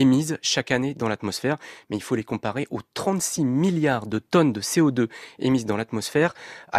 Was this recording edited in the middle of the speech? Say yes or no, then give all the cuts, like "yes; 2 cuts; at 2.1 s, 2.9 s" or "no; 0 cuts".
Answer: no; 0 cuts